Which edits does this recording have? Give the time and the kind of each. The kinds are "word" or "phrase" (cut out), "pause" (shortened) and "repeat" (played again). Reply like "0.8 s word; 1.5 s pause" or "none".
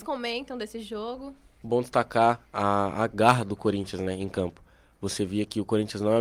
none